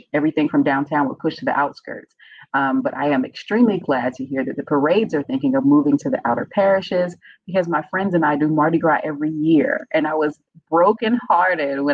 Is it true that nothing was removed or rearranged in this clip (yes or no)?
yes